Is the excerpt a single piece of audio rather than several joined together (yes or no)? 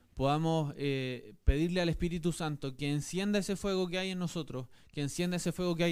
yes